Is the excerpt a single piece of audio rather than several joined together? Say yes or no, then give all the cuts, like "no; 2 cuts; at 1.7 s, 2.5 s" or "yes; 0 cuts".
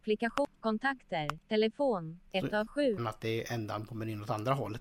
no; 3 cuts; at 1.4 s, 2.3 s, 3.0 s